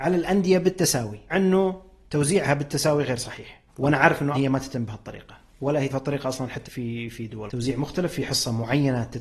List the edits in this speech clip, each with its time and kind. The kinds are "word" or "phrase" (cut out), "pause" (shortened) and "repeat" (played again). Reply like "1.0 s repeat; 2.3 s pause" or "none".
1.3 s word; 3.7 s pause; 4.3 s word; 5.9 s word; 6.6 s word; 7.5 s word